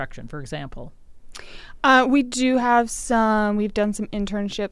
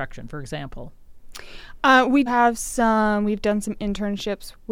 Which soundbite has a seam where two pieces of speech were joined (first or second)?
second